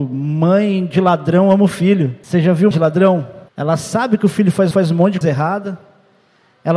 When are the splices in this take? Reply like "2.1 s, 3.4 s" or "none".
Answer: 2.2 s, 2.7 s, 3.5 s, 4.7 s, 5.2 s